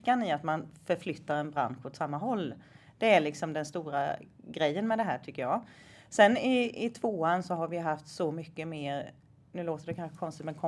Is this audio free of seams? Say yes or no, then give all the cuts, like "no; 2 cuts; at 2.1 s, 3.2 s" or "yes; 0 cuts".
yes; 0 cuts